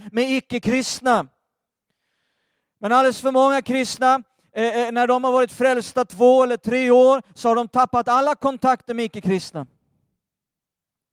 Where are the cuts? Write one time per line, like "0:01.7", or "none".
none